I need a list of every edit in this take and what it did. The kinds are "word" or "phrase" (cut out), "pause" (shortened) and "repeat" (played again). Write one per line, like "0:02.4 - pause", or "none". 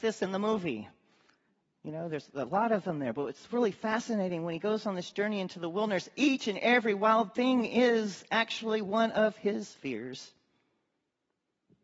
none